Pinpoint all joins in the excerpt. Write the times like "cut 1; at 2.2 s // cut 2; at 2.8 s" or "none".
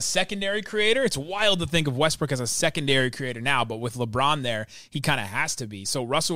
none